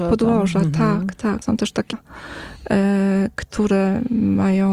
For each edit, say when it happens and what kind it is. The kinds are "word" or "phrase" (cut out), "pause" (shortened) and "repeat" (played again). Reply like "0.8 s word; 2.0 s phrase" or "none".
1.4 s word; 1.9 s word